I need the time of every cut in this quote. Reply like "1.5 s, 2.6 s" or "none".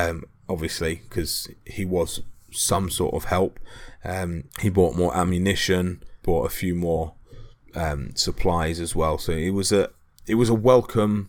4.5 s, 6.2 s

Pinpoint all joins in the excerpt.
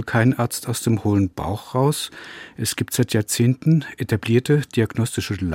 none

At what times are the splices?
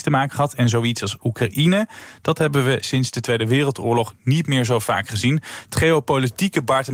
none

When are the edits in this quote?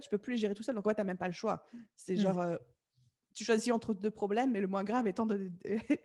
none

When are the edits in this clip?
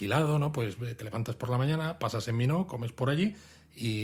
none

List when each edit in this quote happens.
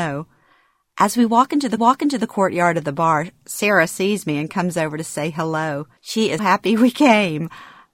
1.8 s, 6.0 s, 6.4 s

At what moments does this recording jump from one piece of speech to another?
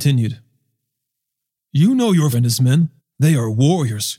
2.3 s, 3.0 s

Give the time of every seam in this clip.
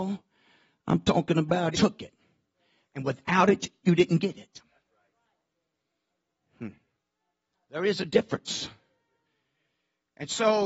1.7 s

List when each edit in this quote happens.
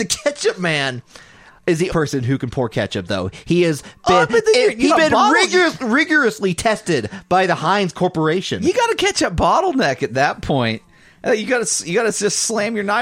1.9 s, 4.9 s

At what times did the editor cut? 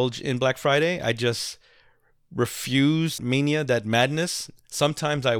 3.2 s

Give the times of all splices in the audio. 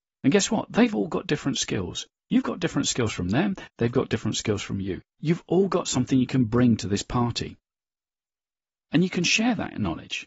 5.1 s

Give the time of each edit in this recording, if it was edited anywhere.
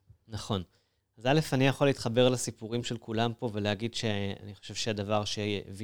none

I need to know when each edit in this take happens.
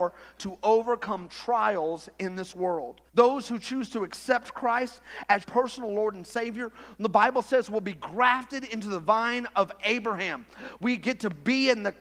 3.1 s, 5.4 s

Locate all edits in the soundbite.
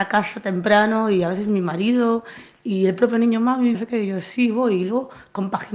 3.7 s

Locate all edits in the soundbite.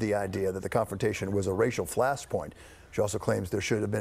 none

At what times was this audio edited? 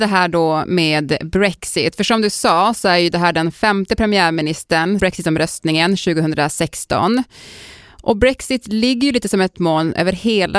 5.0 s, 9.5 s

